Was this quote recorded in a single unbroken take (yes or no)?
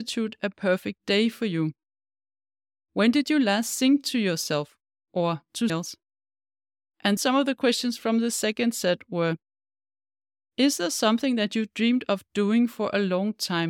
no